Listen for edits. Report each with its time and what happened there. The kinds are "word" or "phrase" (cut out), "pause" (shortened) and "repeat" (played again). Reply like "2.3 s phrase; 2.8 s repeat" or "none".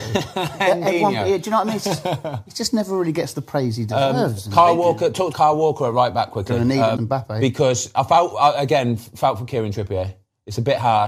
5.3 s phrase; 7.0 s phrase